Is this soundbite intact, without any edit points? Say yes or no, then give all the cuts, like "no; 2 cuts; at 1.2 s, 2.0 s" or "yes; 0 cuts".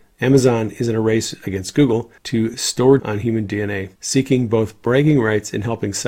no; 3 cuts; at 2.2 s, 3.0 s, 4.0 s